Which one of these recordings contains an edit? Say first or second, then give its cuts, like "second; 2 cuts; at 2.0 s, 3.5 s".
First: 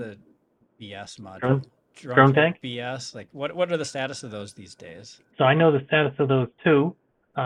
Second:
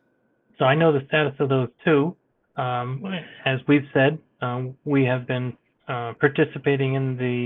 first; 1 cut; at 5.3 s